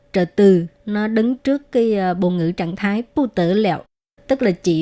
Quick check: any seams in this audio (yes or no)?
no